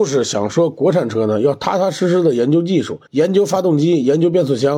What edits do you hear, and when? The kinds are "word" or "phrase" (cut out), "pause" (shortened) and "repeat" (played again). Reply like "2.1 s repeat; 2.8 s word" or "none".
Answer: 3.1 s pause

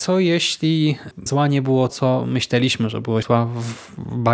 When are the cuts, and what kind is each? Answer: 1.3 s word; 1.9 s word; 3.2 s word

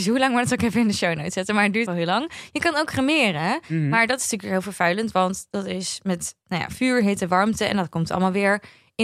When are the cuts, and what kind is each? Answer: 1.9 s phrase

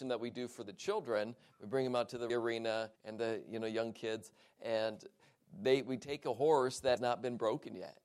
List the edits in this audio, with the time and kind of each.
2.3 s word; 2.9 s pause; 7.0 s word

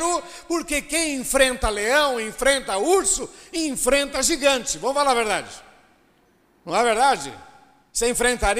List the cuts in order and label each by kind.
none

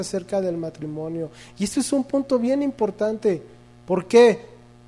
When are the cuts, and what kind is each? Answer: none

